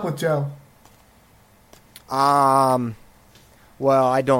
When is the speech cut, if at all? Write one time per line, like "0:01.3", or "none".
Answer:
0:02.0